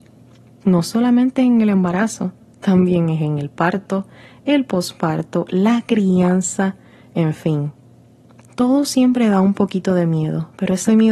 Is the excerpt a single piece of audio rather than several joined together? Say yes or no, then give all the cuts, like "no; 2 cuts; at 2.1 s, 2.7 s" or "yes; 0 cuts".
yes; 0 cuts